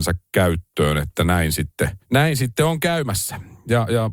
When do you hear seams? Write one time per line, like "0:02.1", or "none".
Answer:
0:02.0

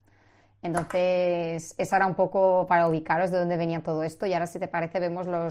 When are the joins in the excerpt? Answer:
none

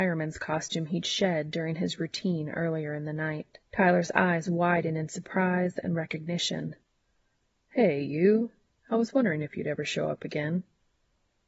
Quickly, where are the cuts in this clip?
0:03.7

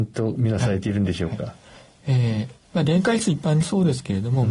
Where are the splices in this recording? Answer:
none

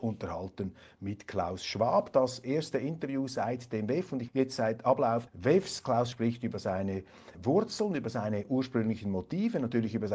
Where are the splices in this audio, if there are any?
0:04.3
0:05.3
0:06.1
0:07.3

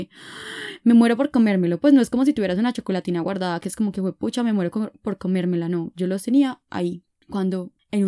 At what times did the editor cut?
none

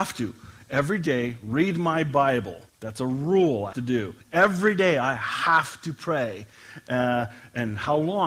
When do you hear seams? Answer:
0:02.7
0:03.7
0:04.2

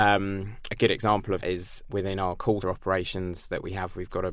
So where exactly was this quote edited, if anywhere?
0:01.4
0:01.9
0:02.6

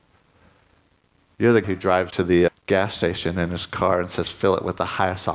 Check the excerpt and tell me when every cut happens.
0:01.6
0:02.1
0:02.5

